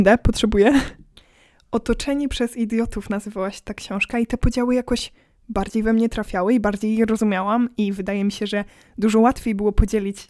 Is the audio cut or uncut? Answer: uncut